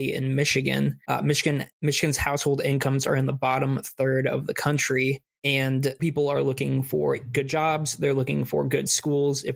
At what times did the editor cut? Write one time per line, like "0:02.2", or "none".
0:06.0